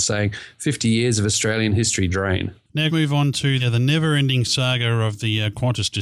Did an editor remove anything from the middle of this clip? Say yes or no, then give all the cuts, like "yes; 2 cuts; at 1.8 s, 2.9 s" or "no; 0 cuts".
yes; 3 cuts; at 2.1 s, 2.9 s, 3.6 s